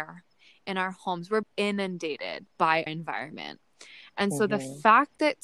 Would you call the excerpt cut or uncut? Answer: cut